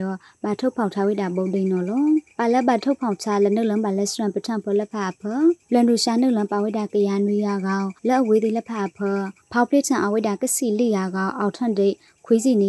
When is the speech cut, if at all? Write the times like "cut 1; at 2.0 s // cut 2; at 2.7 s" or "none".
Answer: cut 1; at 5.6 s // cut 2; at 8.0 s // cut 3; at 9.4 s